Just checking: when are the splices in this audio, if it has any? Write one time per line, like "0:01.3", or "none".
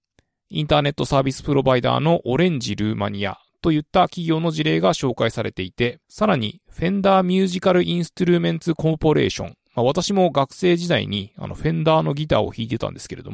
0:06.0